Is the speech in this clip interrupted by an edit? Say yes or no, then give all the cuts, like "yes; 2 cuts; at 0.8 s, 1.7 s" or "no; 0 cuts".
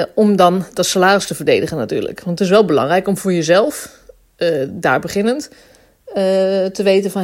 no; 0 cuts